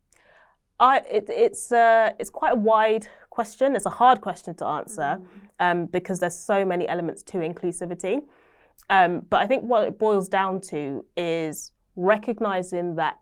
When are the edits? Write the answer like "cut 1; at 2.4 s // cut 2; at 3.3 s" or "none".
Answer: none